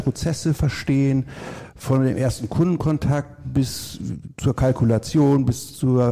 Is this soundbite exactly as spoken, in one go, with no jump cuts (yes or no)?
yes